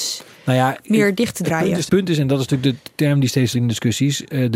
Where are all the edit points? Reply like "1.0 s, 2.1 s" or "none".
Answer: 1.9 s, 3.5 s

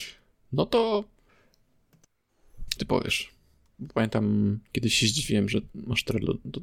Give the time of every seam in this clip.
2.8 s

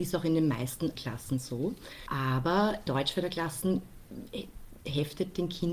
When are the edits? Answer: 0.9 s, 2.9 s

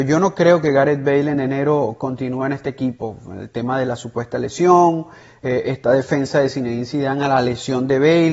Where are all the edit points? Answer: none

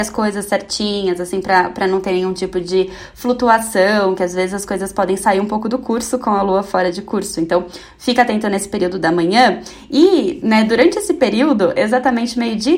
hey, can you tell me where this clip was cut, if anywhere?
none

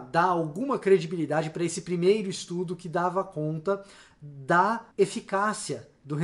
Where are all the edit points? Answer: 4.9 s

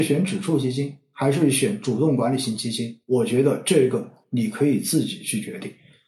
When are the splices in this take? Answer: 3.0 s

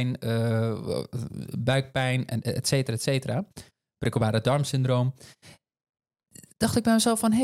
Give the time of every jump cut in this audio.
none

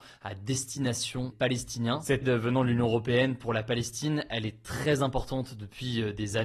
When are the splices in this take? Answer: 1.3 s, 2.2 s

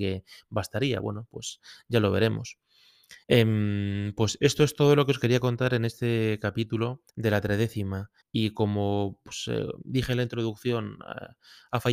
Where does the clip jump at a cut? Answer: 3.2 s, 7.1 s, 8.2 s

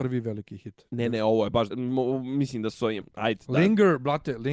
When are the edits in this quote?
1.7 s, 3.0 s

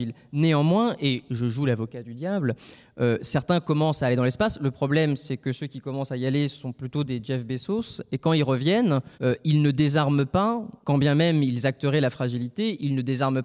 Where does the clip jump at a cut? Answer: 9.1 s, 10.8 s

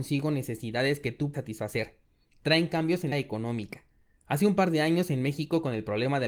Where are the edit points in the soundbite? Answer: 1.3 s, 3.1 s

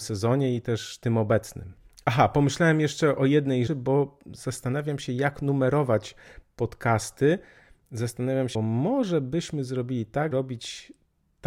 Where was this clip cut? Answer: 3.7 s, 8.5 s, 10.3 s

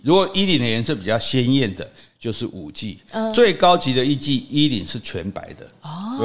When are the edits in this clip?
none

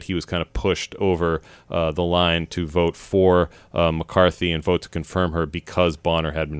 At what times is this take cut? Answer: none

